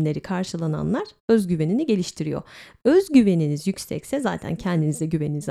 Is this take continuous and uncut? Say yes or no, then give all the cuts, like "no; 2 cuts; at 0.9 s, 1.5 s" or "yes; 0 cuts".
yes; 0 cuts